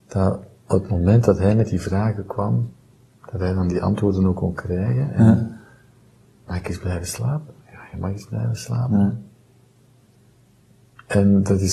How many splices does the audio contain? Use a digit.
0